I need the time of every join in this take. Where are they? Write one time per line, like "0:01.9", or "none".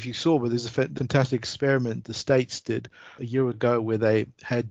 0:01.0
0:02.0
0:03.2
0:03.5